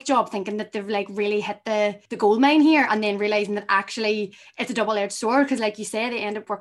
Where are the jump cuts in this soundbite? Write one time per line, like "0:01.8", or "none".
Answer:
0:02.0